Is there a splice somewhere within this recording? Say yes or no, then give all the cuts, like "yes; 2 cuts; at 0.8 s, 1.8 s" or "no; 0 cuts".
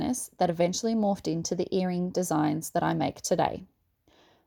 no; 0 cuts